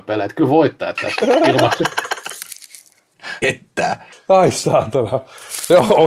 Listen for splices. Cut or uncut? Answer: cut